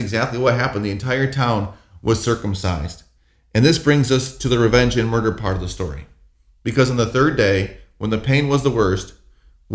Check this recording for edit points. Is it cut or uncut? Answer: uncut